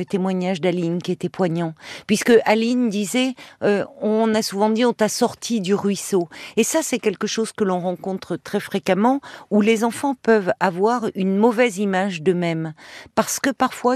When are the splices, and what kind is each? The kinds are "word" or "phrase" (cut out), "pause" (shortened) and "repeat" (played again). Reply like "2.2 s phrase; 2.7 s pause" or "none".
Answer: none

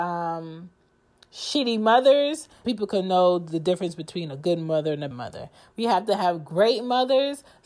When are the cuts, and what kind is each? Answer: 2.6 s word; 5.1 s word

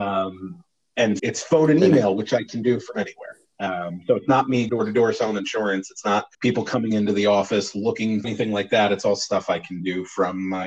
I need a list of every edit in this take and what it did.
1.2 s word; 4.7 s word; 6.3 s pause; 8.2 s phrase

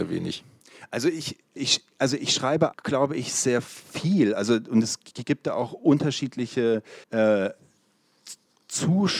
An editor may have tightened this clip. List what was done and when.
1.6 s word; 2.7 s word; 7.0 s pause

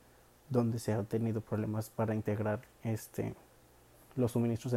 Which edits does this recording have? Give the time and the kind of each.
none

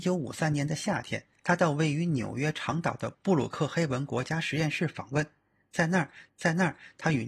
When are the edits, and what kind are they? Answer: 6.3 s repeat

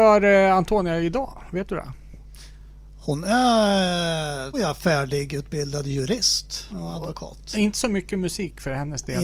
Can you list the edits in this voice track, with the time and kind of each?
4.5 s word; 6.7 s word

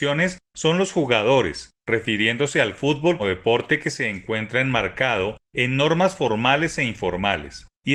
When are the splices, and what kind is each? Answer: 3.2 s word

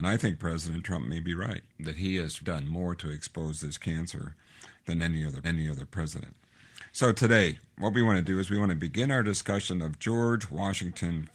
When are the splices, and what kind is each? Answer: 1.7 s pause; 2.4 s word; 5.4 s repeat

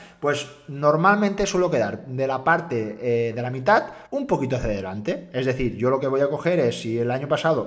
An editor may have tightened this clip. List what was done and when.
4.1 s pause

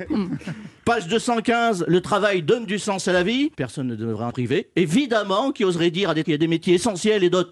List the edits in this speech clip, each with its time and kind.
3.5 s pause; 4.3 s word; 6.2 s word

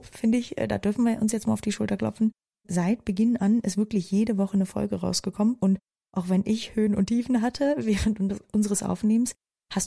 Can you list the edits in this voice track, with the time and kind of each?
none

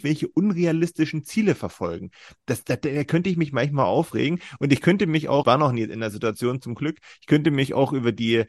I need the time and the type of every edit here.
5.4 s word

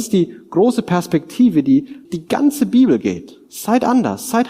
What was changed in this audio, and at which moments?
2.0 s word

